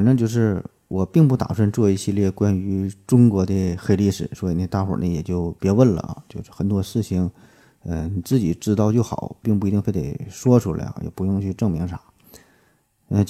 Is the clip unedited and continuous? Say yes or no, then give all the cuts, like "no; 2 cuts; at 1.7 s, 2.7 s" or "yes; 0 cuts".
yes; 0 cuts